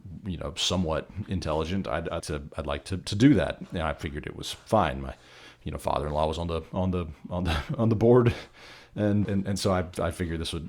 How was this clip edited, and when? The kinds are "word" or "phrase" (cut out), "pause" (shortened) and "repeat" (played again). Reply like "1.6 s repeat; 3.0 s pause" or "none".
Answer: 2.2 s word; 9.2 s word